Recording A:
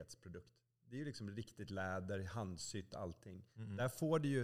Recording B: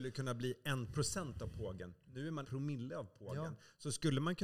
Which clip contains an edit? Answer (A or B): B